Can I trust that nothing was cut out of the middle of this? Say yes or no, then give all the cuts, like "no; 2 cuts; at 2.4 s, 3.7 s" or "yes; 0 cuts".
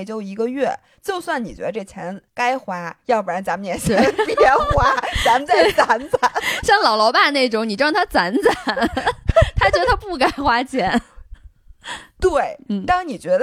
no; 1 cut; at 2.3 s